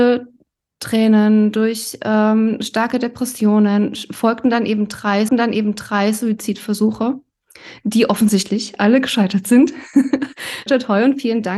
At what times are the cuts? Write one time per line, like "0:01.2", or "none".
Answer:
0:05.3
0:10.7